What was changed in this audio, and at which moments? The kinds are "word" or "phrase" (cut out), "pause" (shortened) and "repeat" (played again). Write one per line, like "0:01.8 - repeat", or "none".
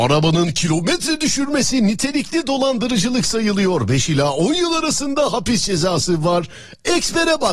none